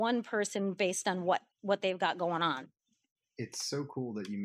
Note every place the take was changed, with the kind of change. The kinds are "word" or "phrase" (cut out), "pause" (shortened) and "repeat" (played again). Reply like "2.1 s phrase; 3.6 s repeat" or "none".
1.5 s pause